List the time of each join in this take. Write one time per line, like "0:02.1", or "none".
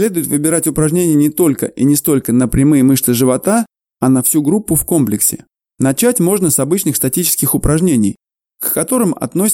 none